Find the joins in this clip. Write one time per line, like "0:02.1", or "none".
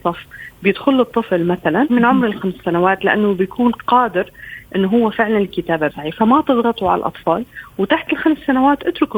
0:01.9
0:05.9